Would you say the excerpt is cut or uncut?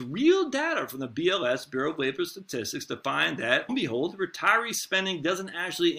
cut